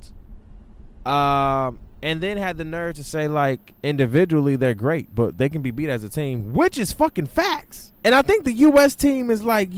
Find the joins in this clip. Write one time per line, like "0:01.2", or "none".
0:03.8
0:08.0